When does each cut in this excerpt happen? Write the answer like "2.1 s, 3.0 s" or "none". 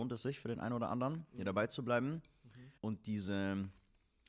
2.8 s